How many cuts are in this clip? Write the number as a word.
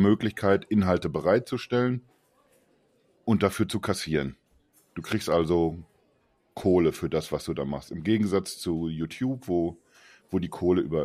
zero